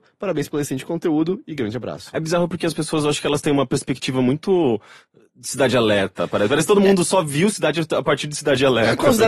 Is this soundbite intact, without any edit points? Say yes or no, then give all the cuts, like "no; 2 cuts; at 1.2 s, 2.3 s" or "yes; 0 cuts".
yes; 0 cuts